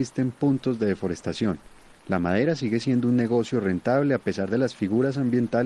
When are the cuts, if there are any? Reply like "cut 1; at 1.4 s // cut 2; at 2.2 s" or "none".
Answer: none